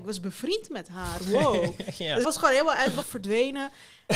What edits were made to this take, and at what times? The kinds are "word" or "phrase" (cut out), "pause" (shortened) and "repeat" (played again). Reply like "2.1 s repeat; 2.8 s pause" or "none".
2.2 s word; 3.0 s word